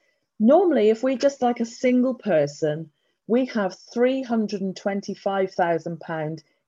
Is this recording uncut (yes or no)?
yes